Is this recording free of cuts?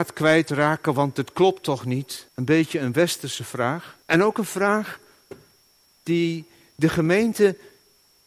no; 2 cuts; at 2.3 s, 4.0 s

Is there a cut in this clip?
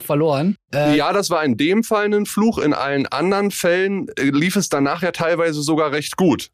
no; 0 cuts

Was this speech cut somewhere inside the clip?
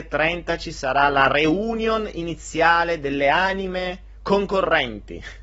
no; 0 cuts

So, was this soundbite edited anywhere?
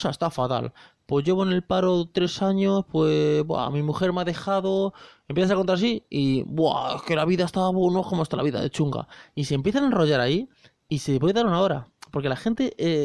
no; 0 cuts

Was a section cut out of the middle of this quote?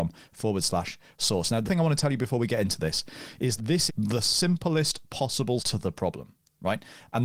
yes; 4 cuts; at 1.6 s, 3.6 s, 3.9 s, 5.6 s

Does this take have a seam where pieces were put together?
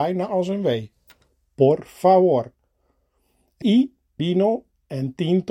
yes; 2 cuts; at 3.6 s, 4.2 s

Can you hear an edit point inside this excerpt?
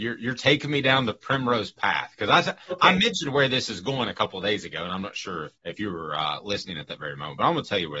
yes; 1 cut; at 5.6 s

